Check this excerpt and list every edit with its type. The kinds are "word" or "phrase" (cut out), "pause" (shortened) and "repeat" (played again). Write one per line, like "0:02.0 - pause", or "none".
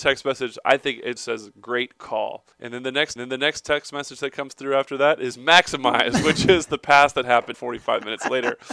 0:01.2 - word
0:02.5 - pause
0:03.2 - repeat
0:07.5 - word